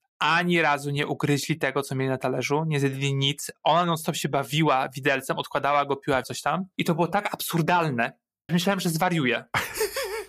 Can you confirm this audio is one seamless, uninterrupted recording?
no; 2 cuts; at 6.2 s, 8.5 s

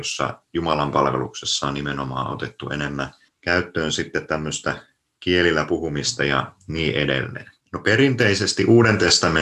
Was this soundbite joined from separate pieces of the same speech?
yes; 1 cut; at 7.6 s

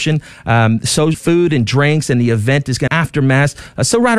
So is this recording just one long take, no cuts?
no; 2 cuts; at 1.1 s, 2.9 s

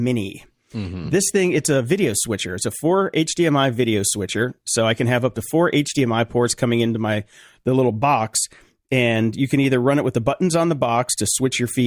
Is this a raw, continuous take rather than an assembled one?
yes; 0 cuts

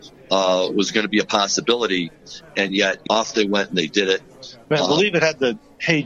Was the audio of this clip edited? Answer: yes; 1 cut; at 3.1 s

